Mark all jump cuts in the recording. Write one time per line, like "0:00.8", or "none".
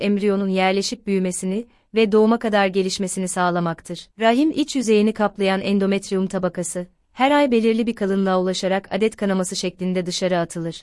0:04.1